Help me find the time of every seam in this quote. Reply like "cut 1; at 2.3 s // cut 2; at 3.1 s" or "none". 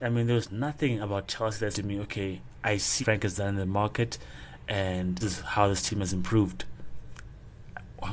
cut 1; at 1.7 s // cut 2; at 3.0 s // cut 3; at 5.2 s